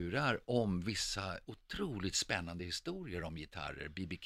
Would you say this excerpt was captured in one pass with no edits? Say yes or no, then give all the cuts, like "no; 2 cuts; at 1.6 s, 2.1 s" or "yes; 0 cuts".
yes; 0 cuts